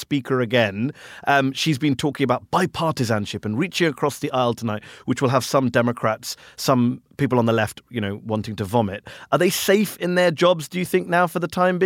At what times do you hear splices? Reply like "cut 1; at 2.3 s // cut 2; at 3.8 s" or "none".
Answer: none